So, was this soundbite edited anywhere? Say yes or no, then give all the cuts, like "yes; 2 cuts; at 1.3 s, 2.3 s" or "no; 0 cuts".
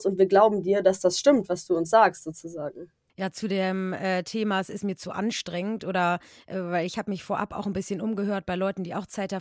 no; 0 cuts